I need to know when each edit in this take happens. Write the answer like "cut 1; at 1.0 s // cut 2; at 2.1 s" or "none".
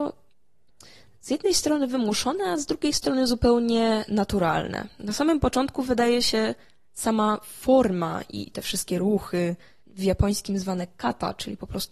cut 1; at 9.8 s